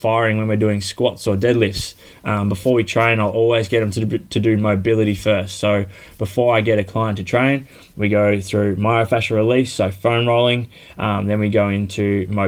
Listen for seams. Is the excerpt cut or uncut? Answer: uncut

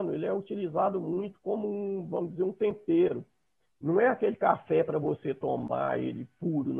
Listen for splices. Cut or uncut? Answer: uncut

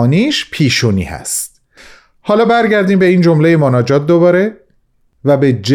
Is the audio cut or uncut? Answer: uncut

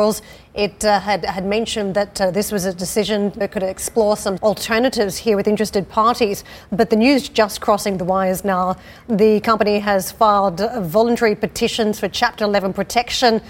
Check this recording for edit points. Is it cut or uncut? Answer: cut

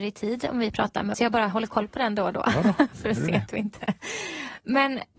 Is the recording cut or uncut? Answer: cut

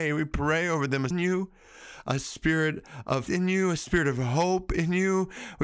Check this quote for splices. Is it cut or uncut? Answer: cut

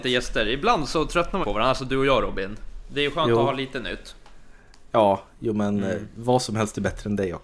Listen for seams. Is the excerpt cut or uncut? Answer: cut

